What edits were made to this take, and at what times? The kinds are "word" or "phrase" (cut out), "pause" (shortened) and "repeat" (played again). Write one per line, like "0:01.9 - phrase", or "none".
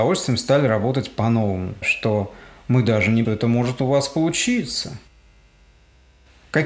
0:01.8 - word
0:03.2 - phrase